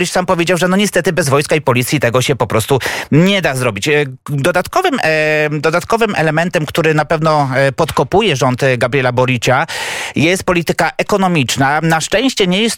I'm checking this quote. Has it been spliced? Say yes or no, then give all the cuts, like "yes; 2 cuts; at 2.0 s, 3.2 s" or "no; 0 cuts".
no; 0 cuts